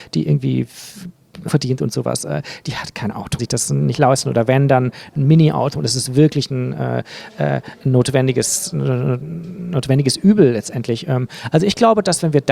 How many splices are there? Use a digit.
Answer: 2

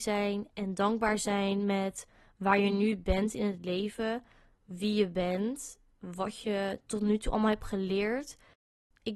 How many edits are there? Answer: 0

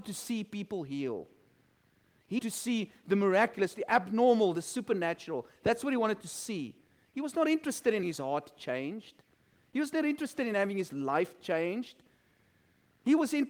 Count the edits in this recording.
2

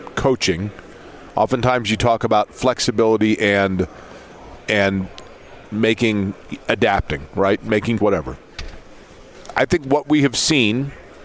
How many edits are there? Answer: 2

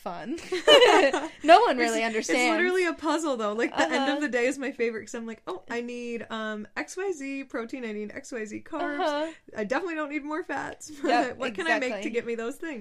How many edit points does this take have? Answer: 0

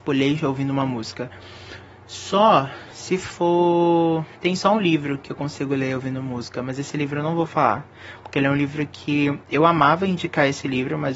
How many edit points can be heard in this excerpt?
1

